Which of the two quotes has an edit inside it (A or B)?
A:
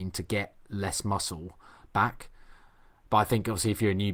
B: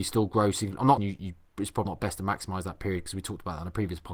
B